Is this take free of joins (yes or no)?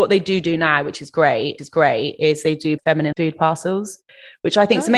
no